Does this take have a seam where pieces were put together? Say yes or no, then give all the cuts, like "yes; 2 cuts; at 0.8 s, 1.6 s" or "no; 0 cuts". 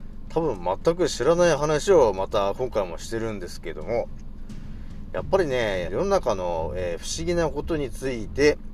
yes; 1 cut; at 5.9 s